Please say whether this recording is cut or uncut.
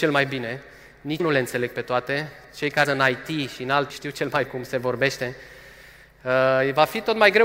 cut